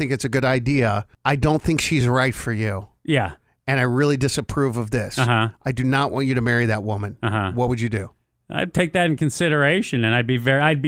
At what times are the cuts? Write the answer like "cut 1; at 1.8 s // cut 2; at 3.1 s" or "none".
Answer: none